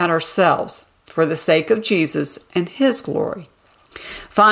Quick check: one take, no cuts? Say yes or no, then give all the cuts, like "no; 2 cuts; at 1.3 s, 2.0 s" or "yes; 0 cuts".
yes; 0 cuts